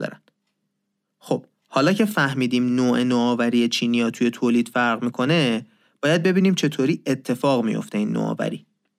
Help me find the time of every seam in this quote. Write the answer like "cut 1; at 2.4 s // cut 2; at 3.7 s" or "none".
none